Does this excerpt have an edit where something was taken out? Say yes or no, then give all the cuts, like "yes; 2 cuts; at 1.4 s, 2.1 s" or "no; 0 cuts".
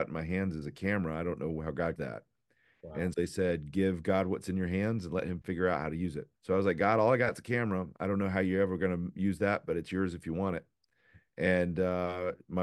yes; 3 cuts; at 2.0 s, 3.1 s, 6.4 s